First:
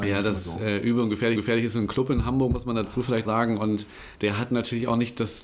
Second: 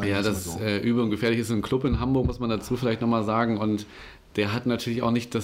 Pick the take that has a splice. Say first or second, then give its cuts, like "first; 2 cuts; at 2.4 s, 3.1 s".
first; 3 cuts; at 1.3 s, 3.2 s, 4.1 s